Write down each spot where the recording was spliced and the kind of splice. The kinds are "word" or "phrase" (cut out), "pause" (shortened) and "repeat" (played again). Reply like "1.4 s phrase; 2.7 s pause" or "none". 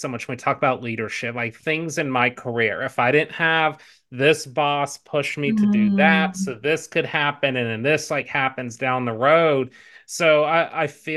none